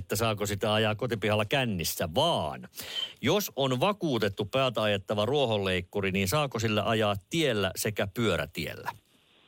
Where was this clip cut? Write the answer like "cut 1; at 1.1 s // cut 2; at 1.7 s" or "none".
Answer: none